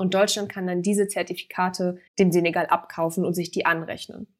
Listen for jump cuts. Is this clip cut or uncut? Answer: cut